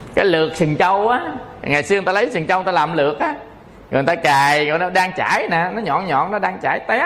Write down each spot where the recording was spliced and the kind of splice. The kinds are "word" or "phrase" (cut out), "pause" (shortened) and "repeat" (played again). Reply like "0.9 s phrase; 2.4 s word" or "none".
none